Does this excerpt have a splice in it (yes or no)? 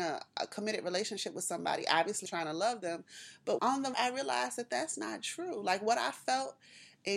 yes